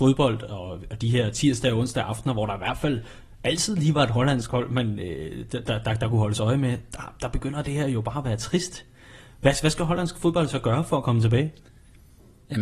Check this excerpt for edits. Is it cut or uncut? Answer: uncut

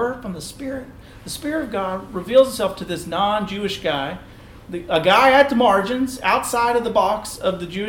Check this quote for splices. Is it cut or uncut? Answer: uncut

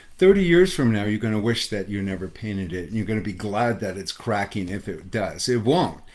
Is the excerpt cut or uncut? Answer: uncut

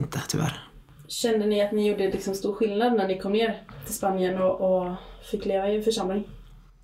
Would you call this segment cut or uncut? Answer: uncut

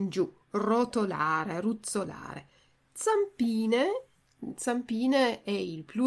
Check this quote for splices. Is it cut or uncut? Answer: uncut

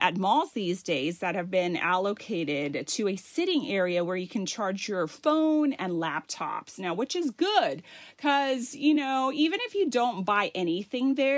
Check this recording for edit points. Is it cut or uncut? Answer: uncut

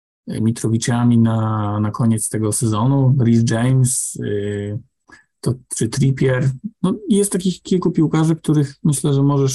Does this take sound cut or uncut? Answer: uncut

